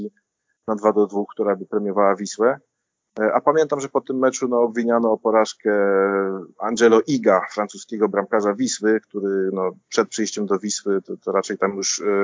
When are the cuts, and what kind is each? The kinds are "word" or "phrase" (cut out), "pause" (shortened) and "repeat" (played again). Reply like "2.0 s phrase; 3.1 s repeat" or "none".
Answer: none